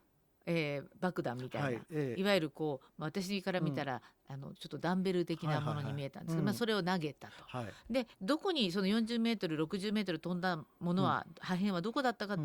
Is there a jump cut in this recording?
yes; 2 cuts; at 0.9 s, 8.1 s

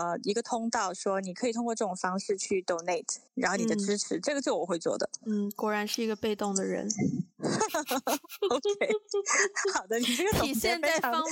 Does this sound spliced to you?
yes; 1 cut; at 3.3 s

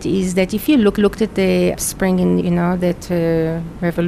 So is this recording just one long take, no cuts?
no; 4 cuts; at 1.0 s, 1.8 s, 2.4 s, 2.8 s

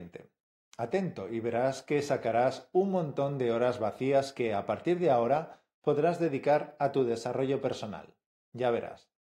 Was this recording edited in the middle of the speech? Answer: no; 0 cuts

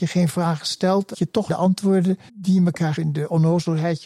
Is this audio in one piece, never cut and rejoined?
no; 4 cuts; at 1.1 s, 1.5 s, 2.3 s, 3.0 s

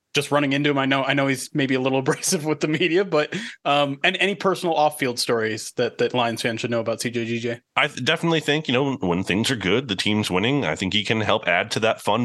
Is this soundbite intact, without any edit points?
no; 1 cut; at 7.7 s

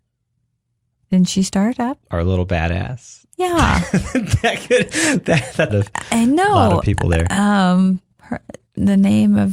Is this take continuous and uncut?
no; 2 cuts; at 2.0 s, 5.7 s

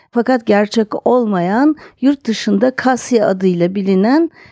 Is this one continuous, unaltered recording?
yes; 0 cuts

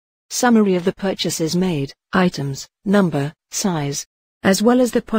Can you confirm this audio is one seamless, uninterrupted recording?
yes; 0 cuts

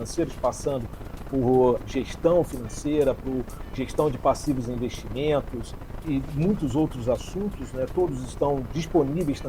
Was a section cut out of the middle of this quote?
no; 0 cuts

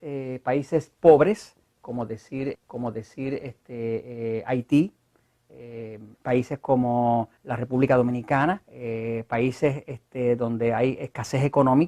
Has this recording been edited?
yes; 4 cuts; at 2.5 s, 6.1 s, 7.4 s, 8.7 s

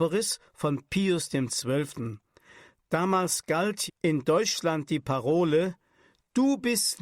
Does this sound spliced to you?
yes; 1 cut; at 3.9 s

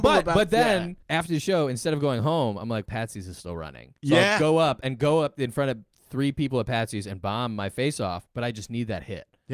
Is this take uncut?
no; 3 cuts; at 1.0 s, 2.9 s, 4.0 s

